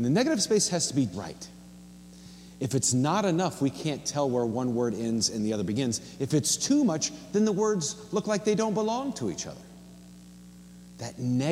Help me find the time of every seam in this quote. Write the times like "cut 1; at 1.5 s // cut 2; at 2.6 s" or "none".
cut 1; at 1.1 s